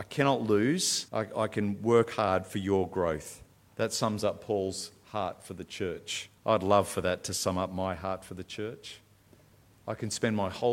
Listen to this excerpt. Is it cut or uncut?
cut